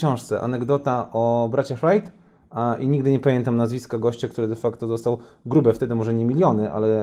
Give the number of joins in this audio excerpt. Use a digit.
0